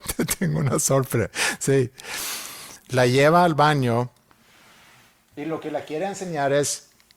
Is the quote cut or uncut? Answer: cut